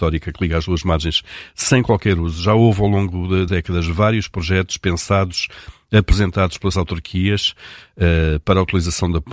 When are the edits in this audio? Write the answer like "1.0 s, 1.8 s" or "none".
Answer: 3.5 s, 6.7 s